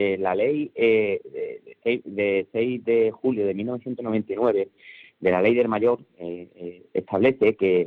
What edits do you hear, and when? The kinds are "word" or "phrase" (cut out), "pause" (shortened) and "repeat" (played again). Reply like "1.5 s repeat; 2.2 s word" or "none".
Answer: none